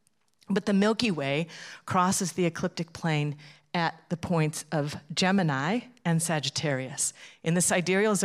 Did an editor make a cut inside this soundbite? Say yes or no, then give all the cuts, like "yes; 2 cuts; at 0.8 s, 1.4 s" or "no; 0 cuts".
no; 0 cuts